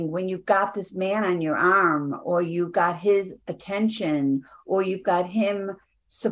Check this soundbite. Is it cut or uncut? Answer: uncut